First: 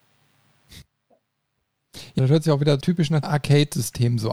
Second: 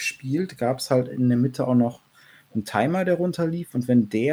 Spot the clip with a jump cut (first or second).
first